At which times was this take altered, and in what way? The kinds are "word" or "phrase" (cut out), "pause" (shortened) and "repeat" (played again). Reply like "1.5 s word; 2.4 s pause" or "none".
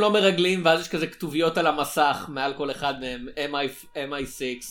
none